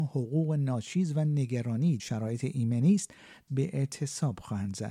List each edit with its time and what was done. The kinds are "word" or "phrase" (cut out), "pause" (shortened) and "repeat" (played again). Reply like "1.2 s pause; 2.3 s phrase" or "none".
2.0 s word; 3.5 s word